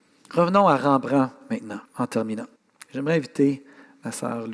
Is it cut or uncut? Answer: cut